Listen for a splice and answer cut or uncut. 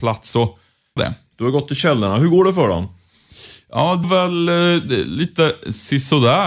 cut